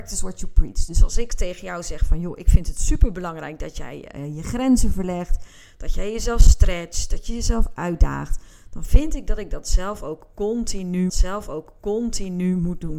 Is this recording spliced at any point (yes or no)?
yes